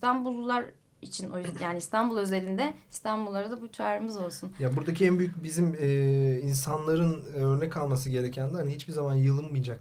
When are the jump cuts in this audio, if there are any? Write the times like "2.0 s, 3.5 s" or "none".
none